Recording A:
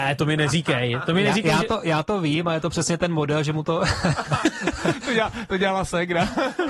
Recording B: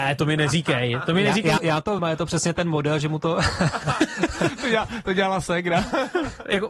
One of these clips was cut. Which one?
B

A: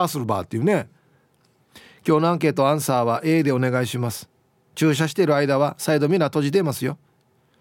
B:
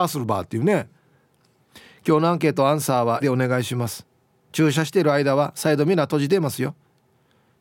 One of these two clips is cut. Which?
B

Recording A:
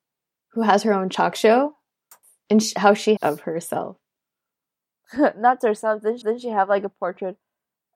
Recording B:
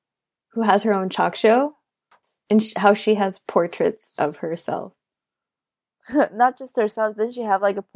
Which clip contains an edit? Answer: A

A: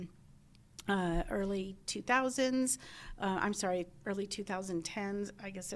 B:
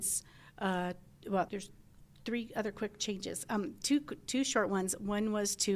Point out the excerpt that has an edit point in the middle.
B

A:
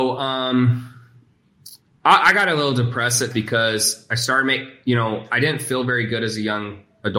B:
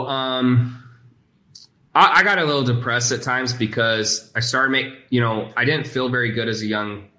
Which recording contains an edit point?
A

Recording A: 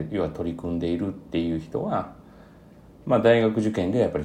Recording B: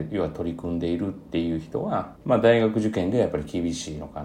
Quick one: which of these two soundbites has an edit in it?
B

